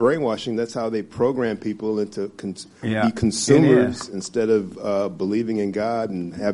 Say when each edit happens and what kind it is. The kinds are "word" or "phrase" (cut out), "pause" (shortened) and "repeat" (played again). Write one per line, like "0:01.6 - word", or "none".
none